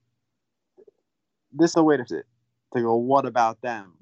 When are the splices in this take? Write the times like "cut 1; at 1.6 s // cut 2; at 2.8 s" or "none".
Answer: cut 1; at 1.7 s // cut 2; at 2.1 s